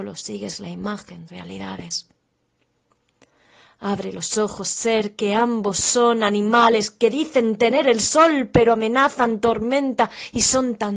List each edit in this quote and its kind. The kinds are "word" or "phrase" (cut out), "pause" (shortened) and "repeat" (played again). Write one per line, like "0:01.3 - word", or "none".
0:01.3 - phrase

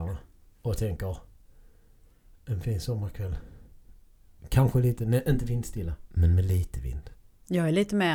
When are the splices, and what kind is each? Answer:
0:06.1 - pause

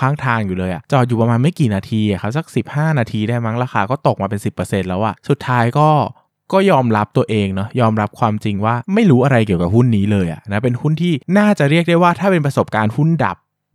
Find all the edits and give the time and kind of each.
0:06.3 - pause
0:08.9 - pause

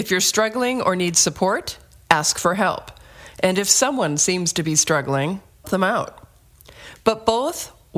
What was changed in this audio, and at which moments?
0:05.6 - word

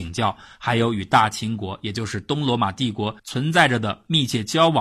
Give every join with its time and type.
0:03.2 - pause

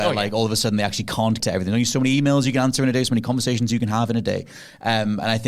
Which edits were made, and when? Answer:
0:01.4 - word

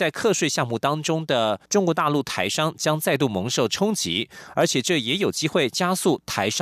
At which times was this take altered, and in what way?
0:01.7 - pause

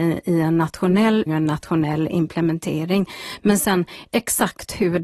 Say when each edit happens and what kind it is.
0:01.3 - word

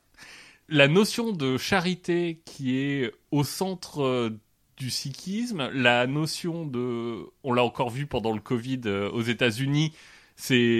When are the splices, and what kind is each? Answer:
none

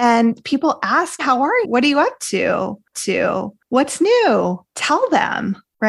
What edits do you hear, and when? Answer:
0:01.2 - phrase
0:01.6 - word
0:02.9 - repeat

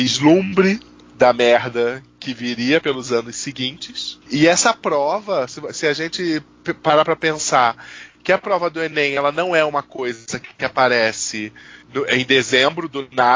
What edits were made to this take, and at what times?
0:04.2 - pause
0:11.8 - pause

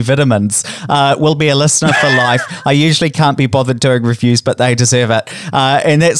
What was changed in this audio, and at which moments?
none

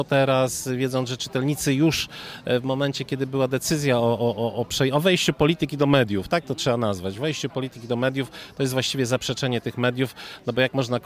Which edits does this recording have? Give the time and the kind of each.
none

